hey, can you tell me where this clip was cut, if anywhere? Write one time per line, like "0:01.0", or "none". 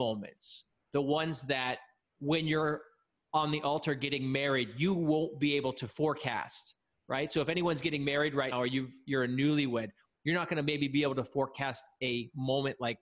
0:08.5